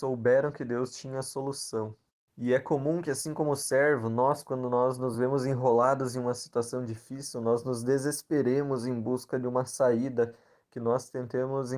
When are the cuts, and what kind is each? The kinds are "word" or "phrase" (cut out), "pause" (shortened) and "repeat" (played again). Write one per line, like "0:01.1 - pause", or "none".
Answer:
none